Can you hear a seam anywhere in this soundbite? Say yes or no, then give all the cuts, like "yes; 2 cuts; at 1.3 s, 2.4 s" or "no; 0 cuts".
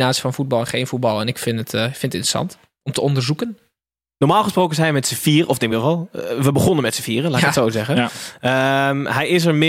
no; 0 cuts